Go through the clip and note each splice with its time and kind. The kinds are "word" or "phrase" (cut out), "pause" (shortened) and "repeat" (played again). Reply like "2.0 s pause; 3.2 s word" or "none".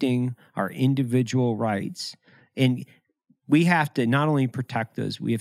none